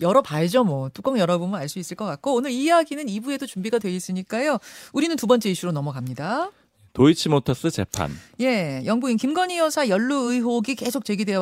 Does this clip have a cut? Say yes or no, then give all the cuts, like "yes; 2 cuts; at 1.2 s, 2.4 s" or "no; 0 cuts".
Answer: no; 0 cuts